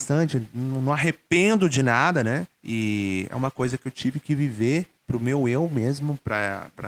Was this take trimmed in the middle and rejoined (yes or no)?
yes